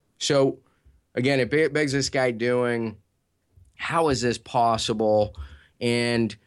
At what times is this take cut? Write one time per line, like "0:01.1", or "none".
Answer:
0:01.9